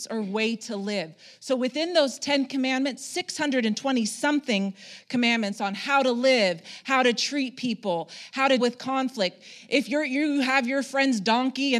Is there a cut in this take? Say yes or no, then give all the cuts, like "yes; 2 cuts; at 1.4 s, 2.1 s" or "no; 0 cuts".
yes; 1 cut; at 8.6 s